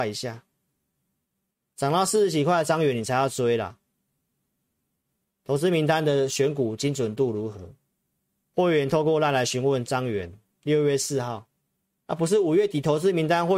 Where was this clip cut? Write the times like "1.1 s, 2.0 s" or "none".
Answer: none